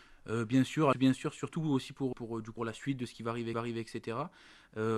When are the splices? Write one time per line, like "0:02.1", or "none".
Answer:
0:00.9
0:02.1
0:02.6
0:03.5